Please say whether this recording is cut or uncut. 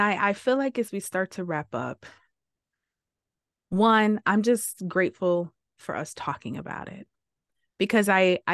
uncut